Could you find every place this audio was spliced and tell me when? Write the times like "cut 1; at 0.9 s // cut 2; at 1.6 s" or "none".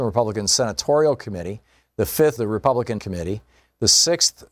cut 1; at 2.4 s // cut 2; at 3.0 s